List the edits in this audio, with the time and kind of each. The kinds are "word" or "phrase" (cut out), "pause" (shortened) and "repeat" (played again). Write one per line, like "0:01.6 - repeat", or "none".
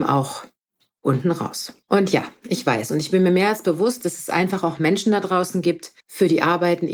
0:01.8 - pause
0:06.0 - pause